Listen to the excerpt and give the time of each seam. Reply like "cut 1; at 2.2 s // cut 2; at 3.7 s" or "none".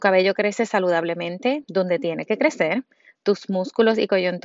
none